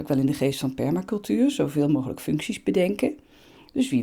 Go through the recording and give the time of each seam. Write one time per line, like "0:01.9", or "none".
none